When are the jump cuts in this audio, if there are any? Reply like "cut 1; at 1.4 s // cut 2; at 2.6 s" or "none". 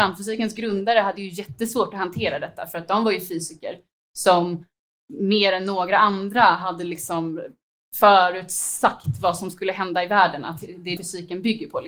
cut 1; at 11.0 s